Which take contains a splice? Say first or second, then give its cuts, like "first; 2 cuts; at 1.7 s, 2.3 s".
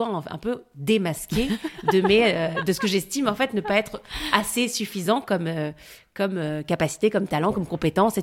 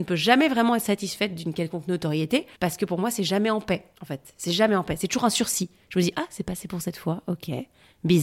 second; 2 cuts; at 2.5 s, 3.9 s